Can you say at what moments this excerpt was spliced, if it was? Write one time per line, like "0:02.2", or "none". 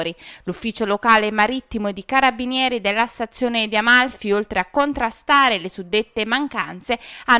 none